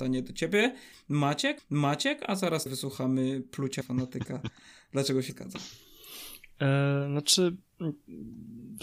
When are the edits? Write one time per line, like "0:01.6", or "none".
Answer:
0:01.6
0:02.7
0:03.8
0:05.3